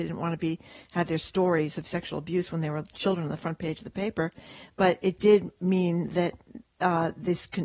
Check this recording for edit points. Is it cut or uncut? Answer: uncut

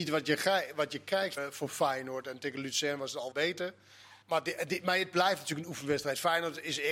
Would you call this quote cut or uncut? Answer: cut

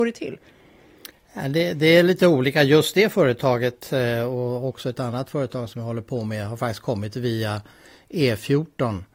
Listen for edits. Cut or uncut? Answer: uncut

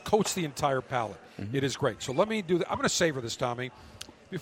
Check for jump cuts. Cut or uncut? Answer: uncut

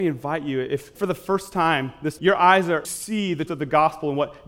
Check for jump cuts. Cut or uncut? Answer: cut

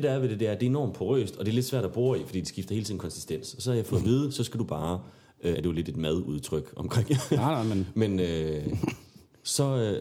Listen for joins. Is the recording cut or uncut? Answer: cut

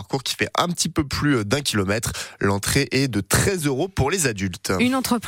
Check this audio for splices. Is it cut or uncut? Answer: uncut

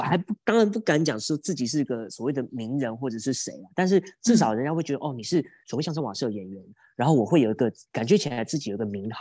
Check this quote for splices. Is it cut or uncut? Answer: uncut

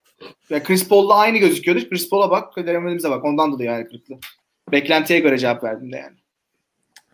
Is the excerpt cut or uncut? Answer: cut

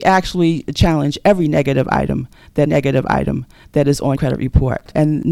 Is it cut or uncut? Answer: cut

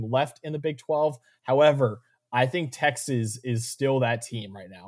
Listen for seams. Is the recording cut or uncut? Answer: uncut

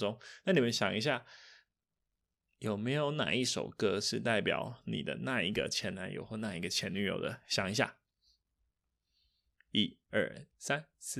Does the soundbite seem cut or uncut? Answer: uncut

